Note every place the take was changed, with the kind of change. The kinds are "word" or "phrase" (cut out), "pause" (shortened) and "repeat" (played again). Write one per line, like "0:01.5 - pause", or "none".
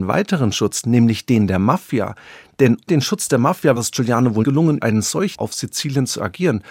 0:02.9 - word
0:03.8 - word
0:04.4 - word
0:04.8 - word
0:05.3 - phrase